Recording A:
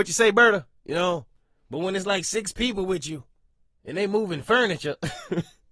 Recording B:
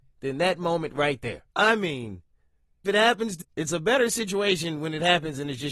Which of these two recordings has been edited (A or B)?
B